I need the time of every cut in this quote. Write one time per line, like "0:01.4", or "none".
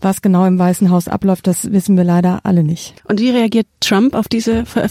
0:03.0